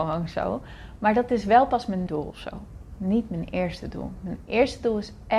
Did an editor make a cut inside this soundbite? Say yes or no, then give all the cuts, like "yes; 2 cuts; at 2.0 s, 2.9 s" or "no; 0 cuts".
yes; 1 cut; at 2.1 s